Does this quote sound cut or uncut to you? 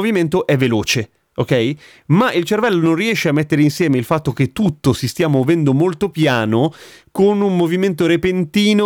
uncut